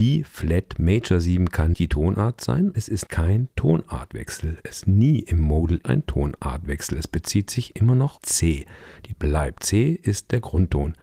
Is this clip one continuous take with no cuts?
no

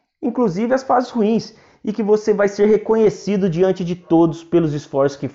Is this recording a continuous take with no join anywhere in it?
yes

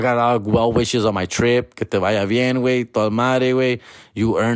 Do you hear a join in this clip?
no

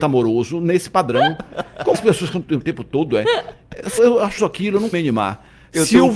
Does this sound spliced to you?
yes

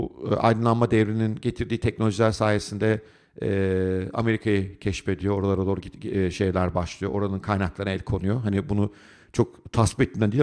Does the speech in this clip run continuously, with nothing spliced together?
yes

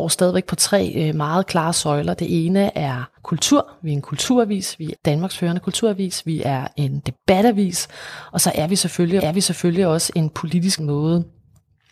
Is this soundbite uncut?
no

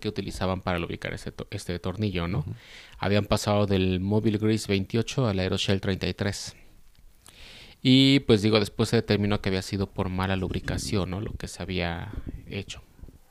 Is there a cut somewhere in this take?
no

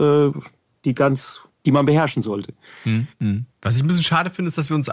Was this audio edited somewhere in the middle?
no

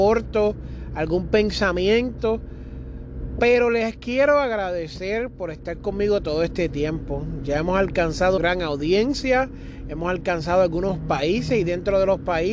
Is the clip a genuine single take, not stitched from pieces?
no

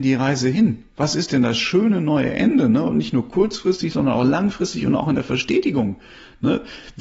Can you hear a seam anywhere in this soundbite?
no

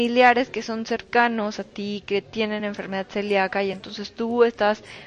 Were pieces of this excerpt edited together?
no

